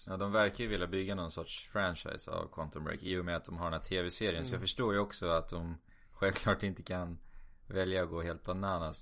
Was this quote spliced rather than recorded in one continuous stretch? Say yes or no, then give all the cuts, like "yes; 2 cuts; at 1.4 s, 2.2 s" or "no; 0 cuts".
no; 0 cuts